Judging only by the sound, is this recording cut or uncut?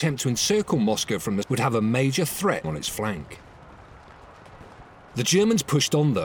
cut